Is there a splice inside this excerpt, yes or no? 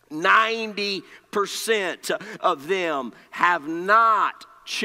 no